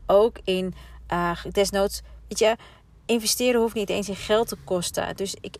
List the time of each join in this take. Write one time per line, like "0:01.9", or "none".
none